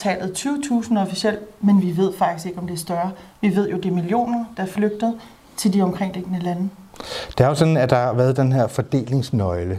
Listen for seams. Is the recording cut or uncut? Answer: uncut